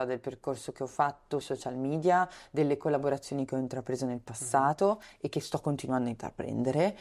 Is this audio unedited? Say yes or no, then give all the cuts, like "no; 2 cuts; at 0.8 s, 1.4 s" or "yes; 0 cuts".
no; 1 cut; at 1.4 s